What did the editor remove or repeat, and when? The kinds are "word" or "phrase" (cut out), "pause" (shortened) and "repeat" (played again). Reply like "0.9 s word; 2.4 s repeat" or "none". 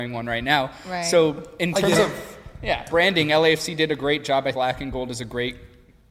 2.9 s phrase; 4.5 s word

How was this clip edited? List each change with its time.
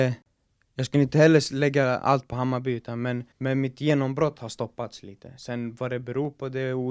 3.3 s pause

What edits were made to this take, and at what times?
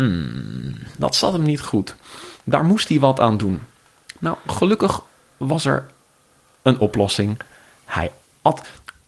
none

